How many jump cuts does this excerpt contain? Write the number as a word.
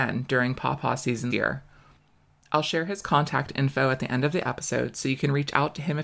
one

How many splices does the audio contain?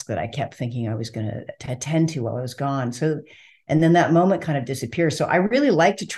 zero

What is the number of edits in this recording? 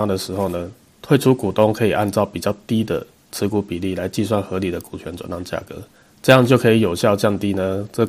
one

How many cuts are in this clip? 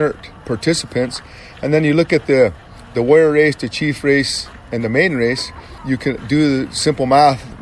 zero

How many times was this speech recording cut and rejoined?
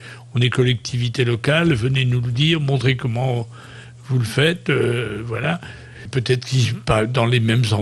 zero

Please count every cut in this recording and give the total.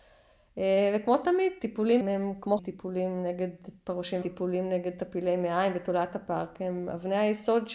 three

